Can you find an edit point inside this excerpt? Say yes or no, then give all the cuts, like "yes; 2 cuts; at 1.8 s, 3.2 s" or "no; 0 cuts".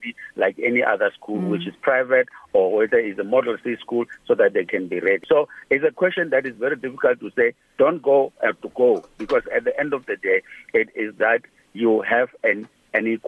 no; 0 cuts